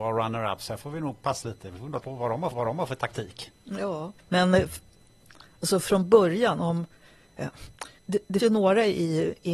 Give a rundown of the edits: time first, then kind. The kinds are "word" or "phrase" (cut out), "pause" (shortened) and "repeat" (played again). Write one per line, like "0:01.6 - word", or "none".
0:01.4 - word
0:02.0 - phrase
0:02.5 - repeat
0:04.2 - pause
0:08.0 - pause
0:08.4 - word

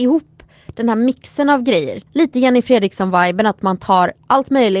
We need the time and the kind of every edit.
0:02.1 - pause

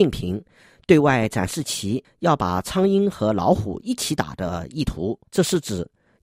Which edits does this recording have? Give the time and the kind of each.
0:05.3 - pause

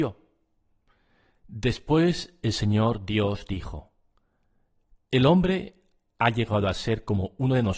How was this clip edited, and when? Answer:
none

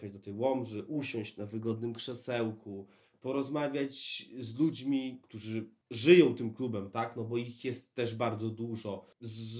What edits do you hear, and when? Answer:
none

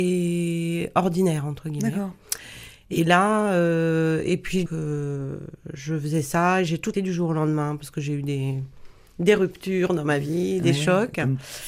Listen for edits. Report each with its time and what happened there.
0:04.7 - word
0:06.9 - word

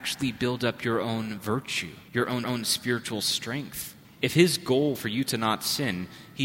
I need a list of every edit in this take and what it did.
0:02.1 - pause
0:02.4 - repeat
0:04.0 - pause
0:04.9 - word

